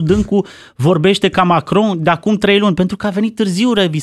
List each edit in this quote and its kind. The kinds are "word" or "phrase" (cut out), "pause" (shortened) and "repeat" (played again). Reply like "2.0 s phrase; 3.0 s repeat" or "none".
none